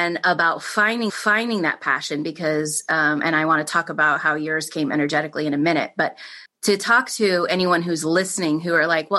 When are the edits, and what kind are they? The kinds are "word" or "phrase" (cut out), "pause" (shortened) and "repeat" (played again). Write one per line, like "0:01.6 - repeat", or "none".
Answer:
0:01.1 - repeat
0:06.5 - pause